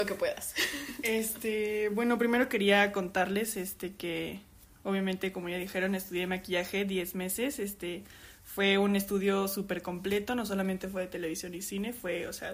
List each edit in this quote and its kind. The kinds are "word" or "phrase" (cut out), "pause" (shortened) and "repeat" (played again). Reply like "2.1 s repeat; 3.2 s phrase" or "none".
none